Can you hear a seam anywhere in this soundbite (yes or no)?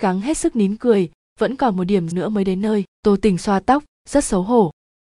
yes